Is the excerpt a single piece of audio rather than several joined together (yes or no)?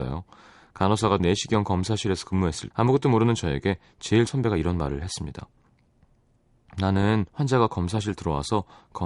no